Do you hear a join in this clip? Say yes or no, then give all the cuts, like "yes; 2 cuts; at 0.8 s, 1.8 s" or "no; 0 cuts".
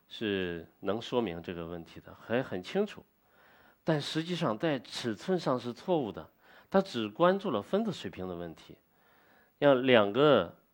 no; 0 cuts